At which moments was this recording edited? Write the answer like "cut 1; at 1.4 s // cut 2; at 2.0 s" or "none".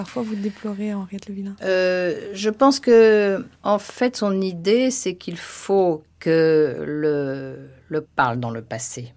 cut 1; at 3.5 s // cut 2; at 8.0 s